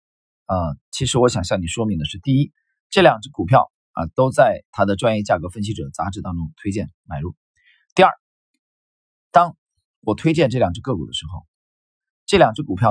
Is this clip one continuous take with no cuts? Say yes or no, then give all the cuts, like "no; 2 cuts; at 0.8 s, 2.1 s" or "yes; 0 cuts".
yes; 0 cuts